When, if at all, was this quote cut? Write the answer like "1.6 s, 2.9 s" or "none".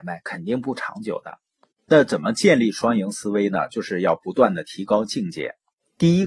none